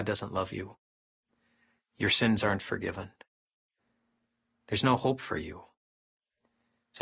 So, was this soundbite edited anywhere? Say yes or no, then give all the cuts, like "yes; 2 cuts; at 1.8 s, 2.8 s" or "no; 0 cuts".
no; 0 cuts